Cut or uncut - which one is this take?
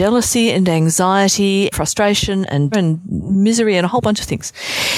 cut